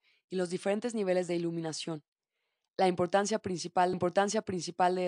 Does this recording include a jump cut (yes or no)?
yes